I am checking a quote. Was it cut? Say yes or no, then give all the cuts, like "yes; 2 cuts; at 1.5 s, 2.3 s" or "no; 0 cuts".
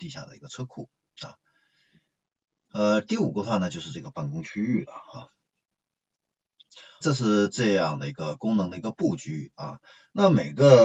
yes; 1 cut; at 7.0 s